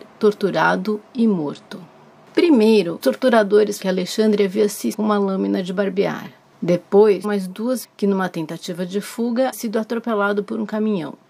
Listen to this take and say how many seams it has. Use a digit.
6